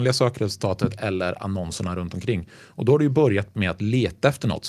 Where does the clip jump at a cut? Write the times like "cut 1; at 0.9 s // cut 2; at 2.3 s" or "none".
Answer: none